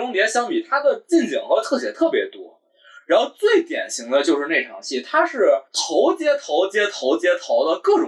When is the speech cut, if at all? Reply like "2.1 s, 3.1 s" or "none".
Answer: 5.7 s